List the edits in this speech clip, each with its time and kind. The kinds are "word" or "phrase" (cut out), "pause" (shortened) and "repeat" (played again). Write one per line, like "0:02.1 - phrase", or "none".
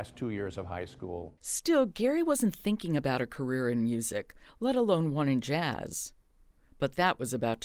0:01.4 - pause